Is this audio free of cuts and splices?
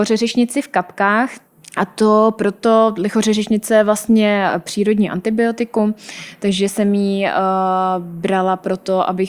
no; 1 cut; at 1.5 s

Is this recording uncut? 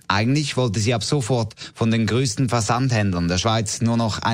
yes; 0 cuts

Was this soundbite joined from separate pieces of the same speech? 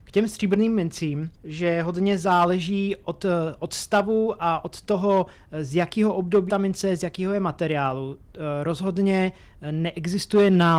yes; 2 cuts; at 1.3 s, 6.5 s

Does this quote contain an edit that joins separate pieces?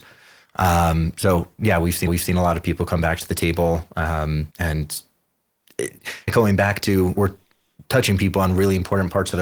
yes; 4 cuts; at 2.1 s, 4.5 s, 6.3 s, 7.2 s

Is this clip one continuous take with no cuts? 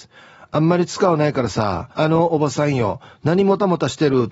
no; 1 cut; at 1.9 s

